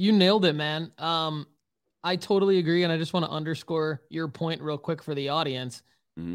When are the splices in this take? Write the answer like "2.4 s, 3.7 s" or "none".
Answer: none